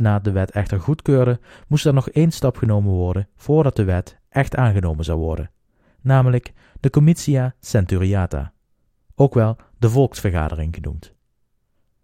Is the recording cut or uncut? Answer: uncut